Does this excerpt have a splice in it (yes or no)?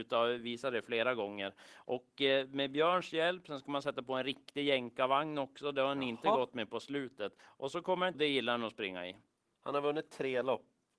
yes